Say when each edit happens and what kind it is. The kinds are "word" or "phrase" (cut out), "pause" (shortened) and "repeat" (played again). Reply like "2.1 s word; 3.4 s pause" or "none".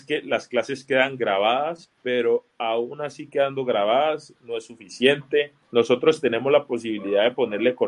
2.0 s pause; 4.4 s word; 5.6 s pause